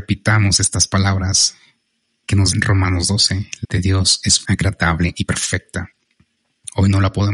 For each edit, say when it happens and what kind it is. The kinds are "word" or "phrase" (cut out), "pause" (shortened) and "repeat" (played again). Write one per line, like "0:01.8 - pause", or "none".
0:02.5 - word
0:03.6 - word
0:04.4 - word